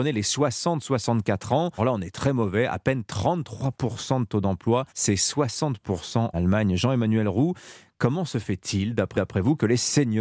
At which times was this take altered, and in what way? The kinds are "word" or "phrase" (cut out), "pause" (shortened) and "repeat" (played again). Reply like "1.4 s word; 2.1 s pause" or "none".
1.8 s word; 4.9 s pause; 6.3 s word; 9.1 s repeat